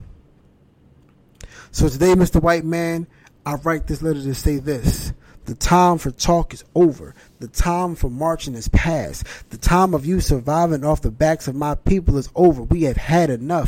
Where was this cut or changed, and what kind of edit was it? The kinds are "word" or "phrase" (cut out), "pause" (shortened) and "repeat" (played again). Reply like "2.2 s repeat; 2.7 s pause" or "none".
none